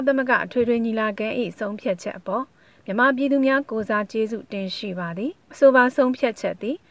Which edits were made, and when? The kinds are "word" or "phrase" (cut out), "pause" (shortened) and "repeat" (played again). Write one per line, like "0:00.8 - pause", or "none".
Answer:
0:05.3 - pause